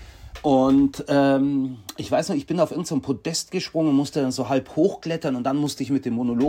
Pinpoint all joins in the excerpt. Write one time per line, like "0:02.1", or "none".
none